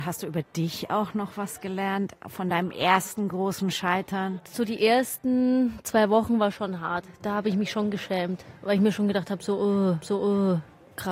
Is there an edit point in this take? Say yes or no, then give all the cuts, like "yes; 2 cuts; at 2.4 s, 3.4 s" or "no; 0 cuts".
yes; 1 cut; at 10.0 s